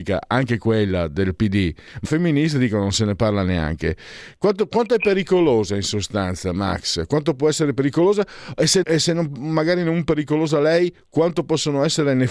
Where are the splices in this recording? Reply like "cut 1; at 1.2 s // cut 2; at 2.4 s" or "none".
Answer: cut 1; at 2.0 s // cut 2; at 8.8 s